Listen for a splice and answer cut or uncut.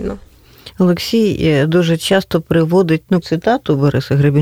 cut